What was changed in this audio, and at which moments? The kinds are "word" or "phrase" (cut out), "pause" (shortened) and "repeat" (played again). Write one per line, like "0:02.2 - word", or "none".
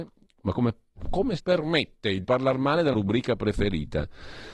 0:01.4 - word
0:02.2 - phrase
0:02.9 - word